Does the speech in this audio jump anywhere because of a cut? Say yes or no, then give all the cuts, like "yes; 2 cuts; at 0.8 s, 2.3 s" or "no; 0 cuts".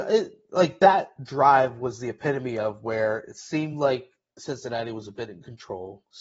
no; 0 cuts